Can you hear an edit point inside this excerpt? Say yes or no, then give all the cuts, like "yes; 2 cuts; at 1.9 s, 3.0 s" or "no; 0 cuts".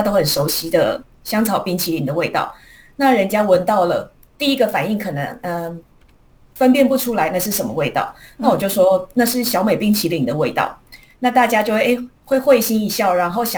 no; 0 cuts